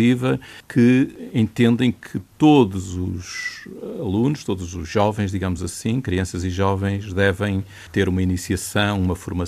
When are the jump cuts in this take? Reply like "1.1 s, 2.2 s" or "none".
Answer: none